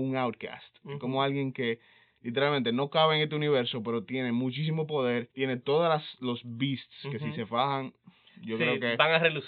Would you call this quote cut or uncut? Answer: cut